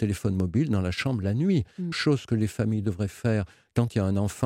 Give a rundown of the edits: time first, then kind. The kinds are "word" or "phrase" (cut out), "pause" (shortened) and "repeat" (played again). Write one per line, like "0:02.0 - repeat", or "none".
0:01.9 - phrase